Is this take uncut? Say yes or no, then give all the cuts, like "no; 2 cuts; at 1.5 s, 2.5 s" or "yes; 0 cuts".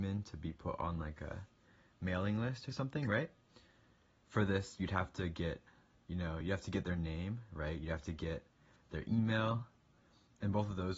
yes; 0 cuts